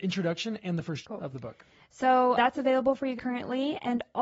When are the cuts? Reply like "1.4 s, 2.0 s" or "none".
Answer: 1.0 s, 2.4 s, 3.2 s